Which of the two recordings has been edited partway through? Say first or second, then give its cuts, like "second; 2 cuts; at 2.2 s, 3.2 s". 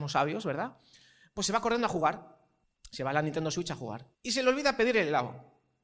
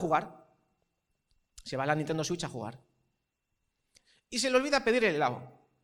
first; 2 cuts; at 2.6 s, 4.1 s